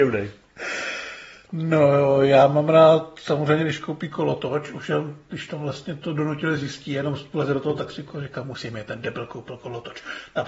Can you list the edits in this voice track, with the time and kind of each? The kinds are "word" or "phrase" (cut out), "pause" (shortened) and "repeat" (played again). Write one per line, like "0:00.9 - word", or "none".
none